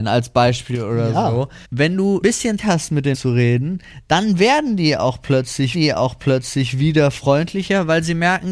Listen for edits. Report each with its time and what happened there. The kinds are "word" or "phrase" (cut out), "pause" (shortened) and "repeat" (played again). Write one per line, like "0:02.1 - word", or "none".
0:01.6 - pause
0:02.2 - word
0:02.6 - word
0:03.1 - word
0:05.7 - repeat